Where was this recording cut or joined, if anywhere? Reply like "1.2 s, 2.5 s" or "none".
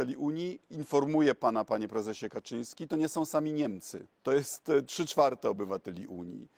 4.1 s